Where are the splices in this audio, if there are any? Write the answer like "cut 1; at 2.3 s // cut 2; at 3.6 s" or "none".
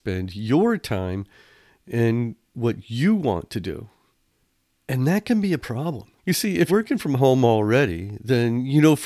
cut 1; at 2.5 s // cut 2; at 6.2 s // cut 3; at 6.7 s